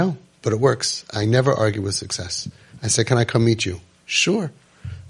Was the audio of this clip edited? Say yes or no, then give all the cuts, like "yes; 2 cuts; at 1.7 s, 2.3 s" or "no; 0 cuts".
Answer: no; 0 cuts